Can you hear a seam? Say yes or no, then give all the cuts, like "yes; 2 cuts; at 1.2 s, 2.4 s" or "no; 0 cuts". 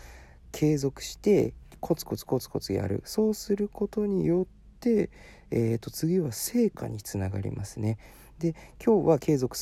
no; 0 cuts